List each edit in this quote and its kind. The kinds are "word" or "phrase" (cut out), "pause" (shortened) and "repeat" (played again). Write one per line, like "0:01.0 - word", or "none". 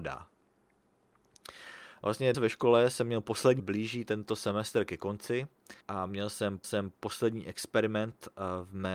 0:02.3 - word
0:03.6 - phrase
0:05.8 - pause
0:06.6 - repeat